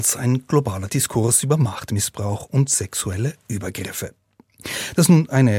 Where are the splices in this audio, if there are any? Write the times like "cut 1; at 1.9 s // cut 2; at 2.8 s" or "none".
none